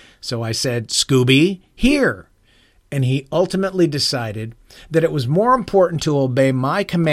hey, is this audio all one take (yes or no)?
yes